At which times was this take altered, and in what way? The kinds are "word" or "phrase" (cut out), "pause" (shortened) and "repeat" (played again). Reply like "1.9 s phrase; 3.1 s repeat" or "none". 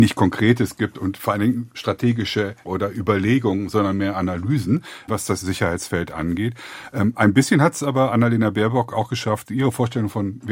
1.7 s word; 2.6 s word; 5.1 s word; 5.4 s word